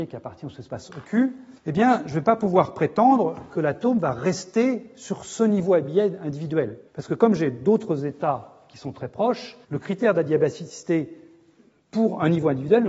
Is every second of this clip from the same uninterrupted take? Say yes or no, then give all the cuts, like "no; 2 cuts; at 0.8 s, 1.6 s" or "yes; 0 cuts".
no; 3 cuts; at 1.6 s, 6.9 s, 9.6 s